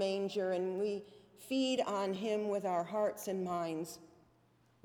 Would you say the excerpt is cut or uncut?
uncut